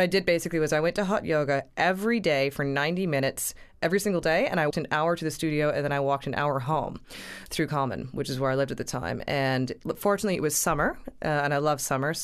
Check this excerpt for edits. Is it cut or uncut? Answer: cut